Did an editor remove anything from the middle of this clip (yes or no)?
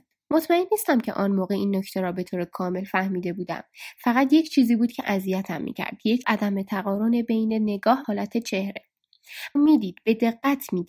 yes